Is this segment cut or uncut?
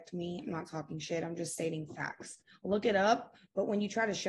uncut